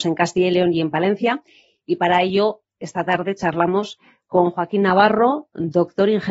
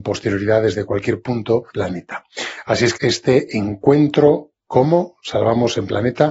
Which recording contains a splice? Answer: second; 3 cuts; at 1.7 s, 3.0 s, 4.5 s

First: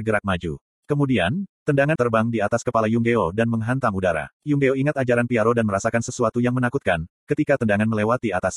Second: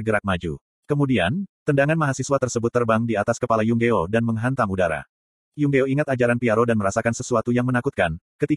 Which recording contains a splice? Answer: first; 2 cuts; at 2.0 s, 4.4 s

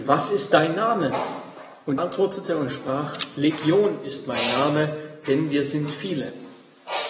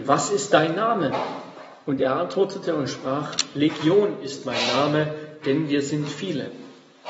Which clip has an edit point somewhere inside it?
first; 1 cut; at 2.0 s

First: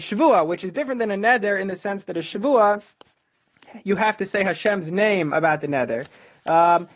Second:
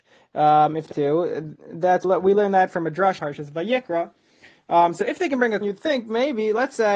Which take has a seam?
second; 4 cuts; at 0.9 s, 2.0 s, 3.2 s, 5.6 s

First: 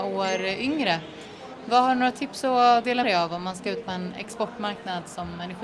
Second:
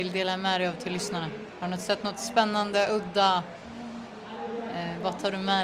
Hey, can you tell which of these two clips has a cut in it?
first; 1 cut; at 3.0 s

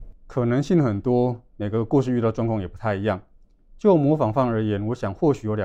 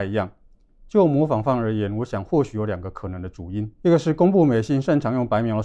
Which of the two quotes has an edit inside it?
second; 1 cut; at 3.7 s

